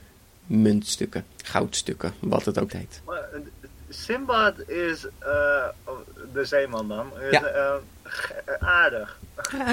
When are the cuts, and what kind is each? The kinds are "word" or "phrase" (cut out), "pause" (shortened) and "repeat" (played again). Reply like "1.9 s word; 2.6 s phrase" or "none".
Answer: 2.7 s phrase; 5.2 s pause; 8.6 s word